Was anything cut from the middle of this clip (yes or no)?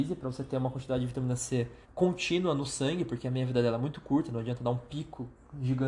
yes